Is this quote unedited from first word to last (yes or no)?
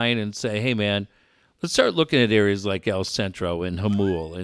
yes